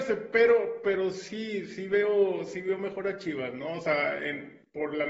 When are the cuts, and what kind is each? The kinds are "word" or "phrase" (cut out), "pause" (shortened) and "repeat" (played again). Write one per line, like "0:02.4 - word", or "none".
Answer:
none